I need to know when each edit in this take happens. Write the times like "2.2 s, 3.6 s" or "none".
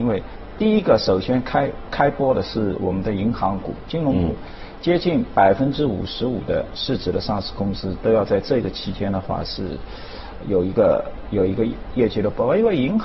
10.4 s